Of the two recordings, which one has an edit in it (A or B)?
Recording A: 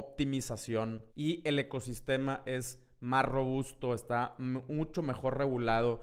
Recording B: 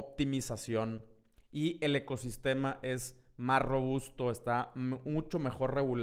A